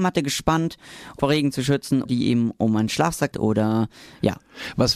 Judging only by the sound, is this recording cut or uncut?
cut